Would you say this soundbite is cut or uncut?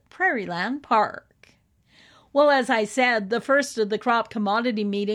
uncut